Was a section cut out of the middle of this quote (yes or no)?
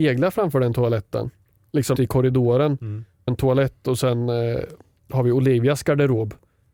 yes